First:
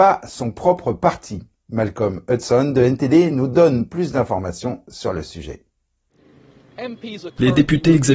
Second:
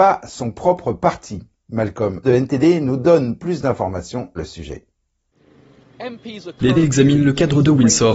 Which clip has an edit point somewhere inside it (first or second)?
second